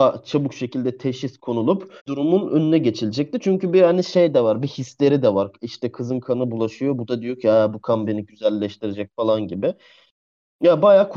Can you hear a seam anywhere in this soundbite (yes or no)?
yes